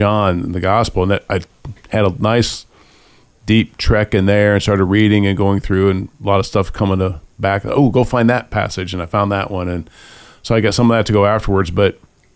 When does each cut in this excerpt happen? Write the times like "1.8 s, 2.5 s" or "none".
none